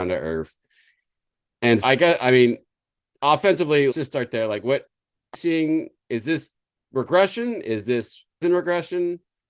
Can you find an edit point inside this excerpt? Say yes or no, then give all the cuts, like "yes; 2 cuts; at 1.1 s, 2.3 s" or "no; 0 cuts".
yes; 4 cuts; at 1.8 s, 3.9 s, 5.3 s, 8.4 s